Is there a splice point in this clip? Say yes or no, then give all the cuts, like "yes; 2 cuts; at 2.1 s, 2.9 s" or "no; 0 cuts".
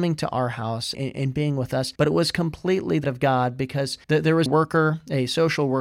yes; 5 cuts; at 0.9 s, 1.9 s, 3.0 s, 4.0 s, 4.5 s